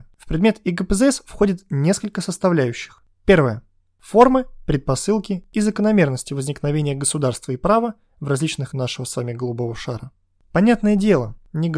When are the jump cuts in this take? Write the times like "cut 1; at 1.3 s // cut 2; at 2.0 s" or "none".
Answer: cut 1; at 8.7 s

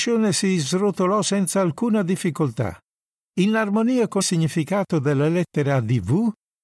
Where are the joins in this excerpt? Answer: cut 1; at 4.2 s

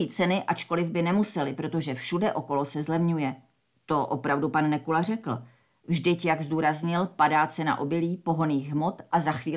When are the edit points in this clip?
none

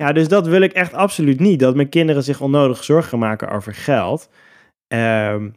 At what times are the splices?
none

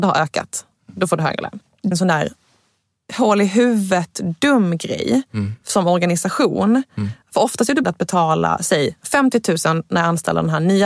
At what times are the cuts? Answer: cut 1; at 1.9 s // cut 2; at 7.8 s

